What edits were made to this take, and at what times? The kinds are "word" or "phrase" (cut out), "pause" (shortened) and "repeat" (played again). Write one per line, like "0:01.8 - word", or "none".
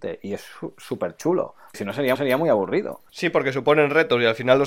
0:01.7 - word
0:02.2 - repeat